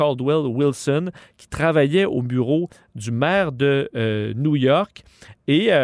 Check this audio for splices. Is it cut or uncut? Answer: uncut